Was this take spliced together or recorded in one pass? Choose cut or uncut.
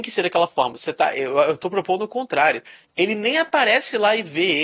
uncut